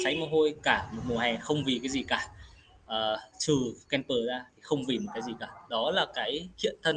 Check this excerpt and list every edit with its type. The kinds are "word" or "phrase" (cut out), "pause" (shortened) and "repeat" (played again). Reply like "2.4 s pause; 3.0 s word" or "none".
none